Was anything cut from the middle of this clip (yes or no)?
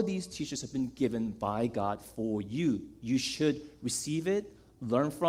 no